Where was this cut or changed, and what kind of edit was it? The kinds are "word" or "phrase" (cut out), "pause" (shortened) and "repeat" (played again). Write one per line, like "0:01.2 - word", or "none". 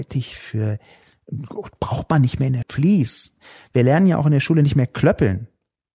0:02.6 - word